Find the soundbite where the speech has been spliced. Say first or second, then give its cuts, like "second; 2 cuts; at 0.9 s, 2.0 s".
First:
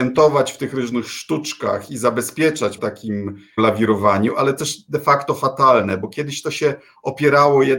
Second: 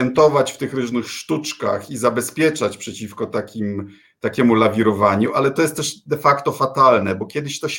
first; 3 cuts; at 2.8 s, 3.6 s, 4.6 s